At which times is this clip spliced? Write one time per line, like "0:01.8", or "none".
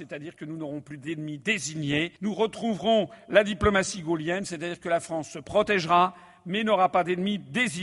0:02.2